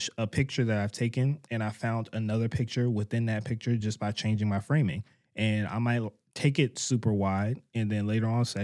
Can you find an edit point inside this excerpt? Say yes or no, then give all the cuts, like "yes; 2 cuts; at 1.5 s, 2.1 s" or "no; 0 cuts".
no; 0 cuts